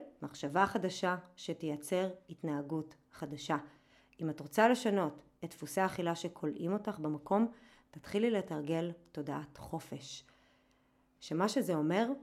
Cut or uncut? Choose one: uncut